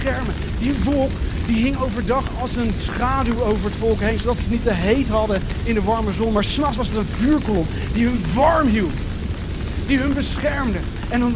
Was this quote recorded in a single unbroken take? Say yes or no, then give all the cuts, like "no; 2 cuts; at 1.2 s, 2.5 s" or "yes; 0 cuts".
yes; 0 cuts